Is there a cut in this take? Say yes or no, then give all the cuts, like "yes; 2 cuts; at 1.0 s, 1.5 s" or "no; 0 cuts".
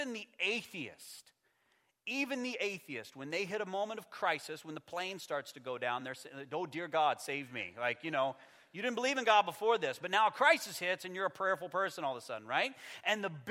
no; 0 cuts